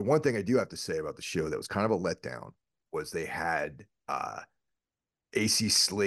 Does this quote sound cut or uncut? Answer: uncut